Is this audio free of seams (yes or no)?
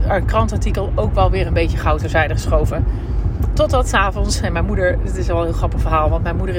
yes